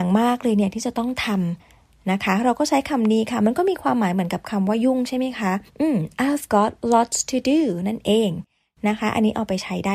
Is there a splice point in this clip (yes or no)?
yes